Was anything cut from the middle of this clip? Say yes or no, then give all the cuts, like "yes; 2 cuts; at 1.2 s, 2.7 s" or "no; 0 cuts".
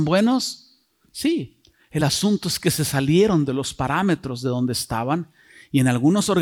no; 0 cuts